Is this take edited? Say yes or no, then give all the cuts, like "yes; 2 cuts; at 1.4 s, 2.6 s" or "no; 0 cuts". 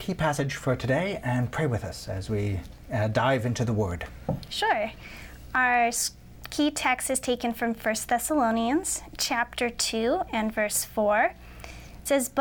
no; 0 cuts